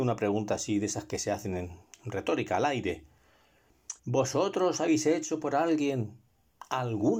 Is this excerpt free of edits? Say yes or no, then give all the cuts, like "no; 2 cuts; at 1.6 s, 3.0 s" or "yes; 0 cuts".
no; 1 cut; at 4.0 s